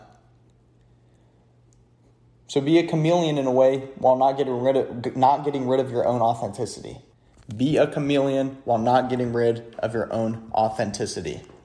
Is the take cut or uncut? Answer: cut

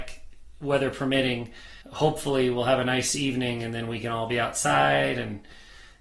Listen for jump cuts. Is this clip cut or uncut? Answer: cut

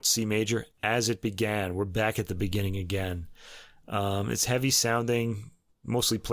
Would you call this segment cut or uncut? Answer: uncut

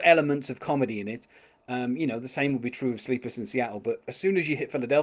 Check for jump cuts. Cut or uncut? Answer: uncut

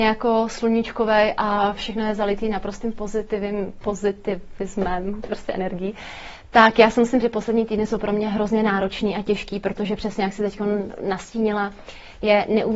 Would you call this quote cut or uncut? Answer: cut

